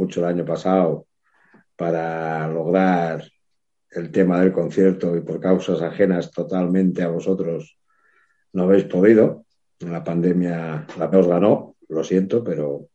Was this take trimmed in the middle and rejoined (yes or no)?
yes